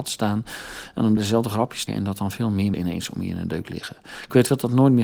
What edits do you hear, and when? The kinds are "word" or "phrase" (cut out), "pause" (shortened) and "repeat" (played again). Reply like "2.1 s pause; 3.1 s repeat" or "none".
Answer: 1.2 s word; 1.9 s word; 2.7 s word